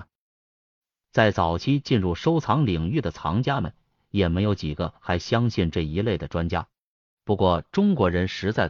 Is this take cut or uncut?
uncut